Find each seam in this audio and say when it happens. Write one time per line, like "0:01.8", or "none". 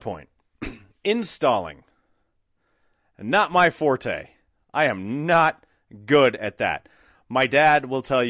none